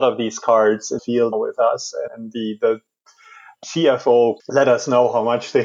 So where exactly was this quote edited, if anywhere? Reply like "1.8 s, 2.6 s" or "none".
1.0 s, 1.3 s, 2.1 s, 3.6 s, 4.4 s